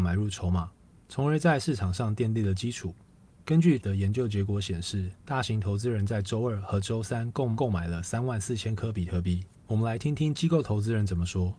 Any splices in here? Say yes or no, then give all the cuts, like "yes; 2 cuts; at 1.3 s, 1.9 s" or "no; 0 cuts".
yes; 1 cut; at 3.8 s